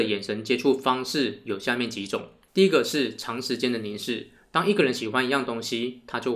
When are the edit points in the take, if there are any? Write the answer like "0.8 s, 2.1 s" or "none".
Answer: 2.5 s